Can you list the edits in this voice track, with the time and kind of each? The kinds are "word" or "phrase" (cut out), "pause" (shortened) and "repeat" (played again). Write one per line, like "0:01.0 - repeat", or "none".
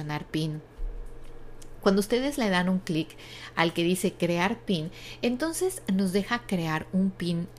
none